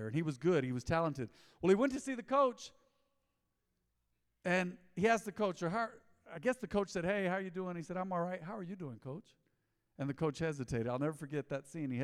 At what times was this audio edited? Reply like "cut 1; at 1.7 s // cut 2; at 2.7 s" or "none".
none